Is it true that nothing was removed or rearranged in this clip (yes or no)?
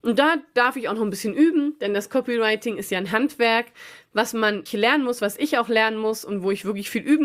no